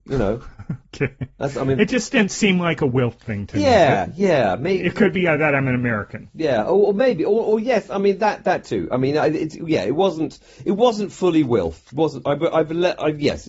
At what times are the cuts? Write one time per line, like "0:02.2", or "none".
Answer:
none